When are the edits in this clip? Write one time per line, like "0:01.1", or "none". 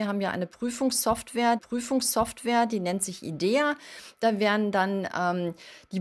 0:01.6